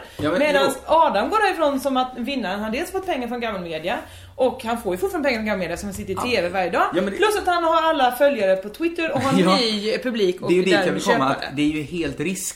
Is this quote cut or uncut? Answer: uncut